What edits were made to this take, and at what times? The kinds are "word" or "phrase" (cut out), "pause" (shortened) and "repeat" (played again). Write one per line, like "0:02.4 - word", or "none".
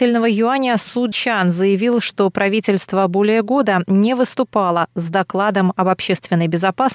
0:01.1 - word